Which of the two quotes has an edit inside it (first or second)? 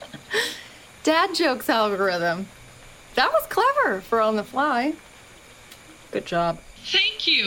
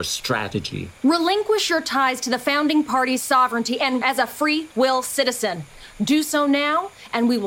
second